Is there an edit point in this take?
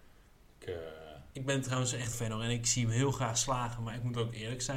yes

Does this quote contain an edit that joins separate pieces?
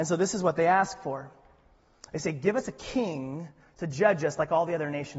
no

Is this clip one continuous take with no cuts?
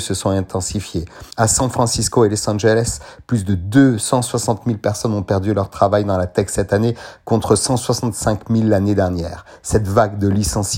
no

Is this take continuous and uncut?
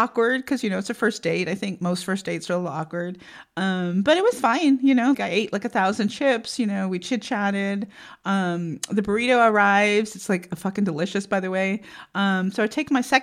no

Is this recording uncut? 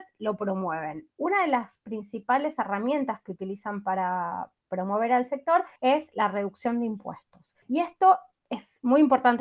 no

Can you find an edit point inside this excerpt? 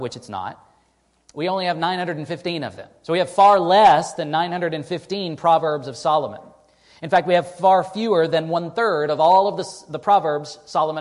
no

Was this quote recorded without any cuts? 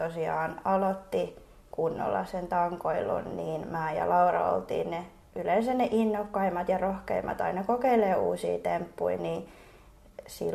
yes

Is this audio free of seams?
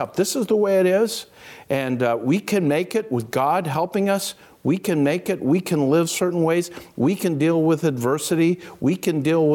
yes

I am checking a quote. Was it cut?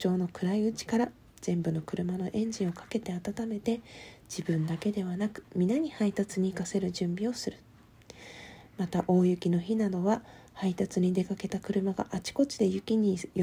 no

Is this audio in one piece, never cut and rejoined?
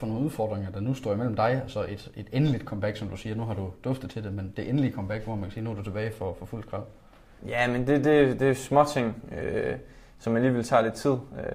yes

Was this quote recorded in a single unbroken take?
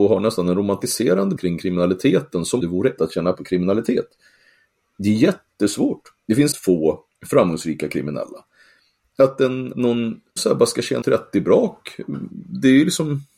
no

